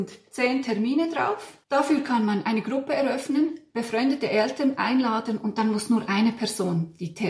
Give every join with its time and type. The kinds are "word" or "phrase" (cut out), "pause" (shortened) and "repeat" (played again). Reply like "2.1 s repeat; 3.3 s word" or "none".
1.6 s pause